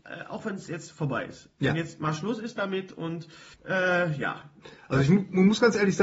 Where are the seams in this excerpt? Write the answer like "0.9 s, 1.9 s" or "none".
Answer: 3.5 s